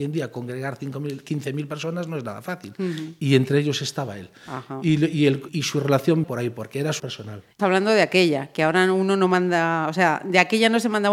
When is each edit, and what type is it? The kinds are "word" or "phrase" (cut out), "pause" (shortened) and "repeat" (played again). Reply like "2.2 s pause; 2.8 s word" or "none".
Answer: 5.5 s word; 6.2 s word; 7.0 s word; 7.6 s word